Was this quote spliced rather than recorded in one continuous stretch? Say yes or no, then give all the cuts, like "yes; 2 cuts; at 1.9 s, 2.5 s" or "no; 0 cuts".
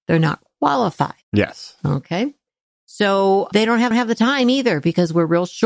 yes; 3 cuts; at 1.2 s, 3.5 s, 3.9 s